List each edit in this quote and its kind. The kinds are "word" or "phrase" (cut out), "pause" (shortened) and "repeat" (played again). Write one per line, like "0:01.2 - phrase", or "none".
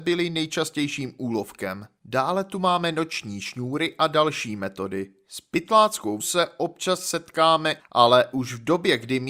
0:06.2 - word
0:07.8 - phrase